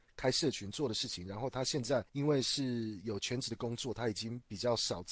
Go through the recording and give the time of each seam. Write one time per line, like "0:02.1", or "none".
0:02.1